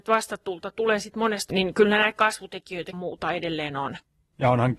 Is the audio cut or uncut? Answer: cut